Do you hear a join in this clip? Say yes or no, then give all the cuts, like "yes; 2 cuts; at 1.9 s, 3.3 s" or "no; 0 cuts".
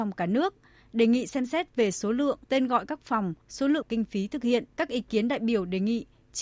yes; 4 cuts; at 2.4 s, 3.4 s, 3.8 s, 4.7 s